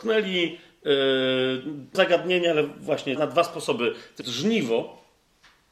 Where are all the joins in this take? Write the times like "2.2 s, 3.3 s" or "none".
1.9 s, 3.2 s, 4.2 s